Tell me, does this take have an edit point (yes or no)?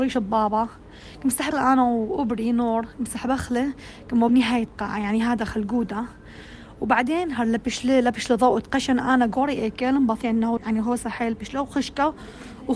yes